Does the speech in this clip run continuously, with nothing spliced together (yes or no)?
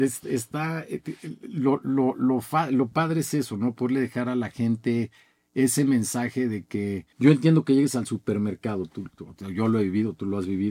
no